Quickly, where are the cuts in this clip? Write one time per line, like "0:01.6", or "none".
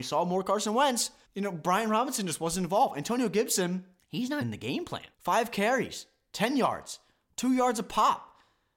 0:01.2
0:04.0
0:04.4
0:05.1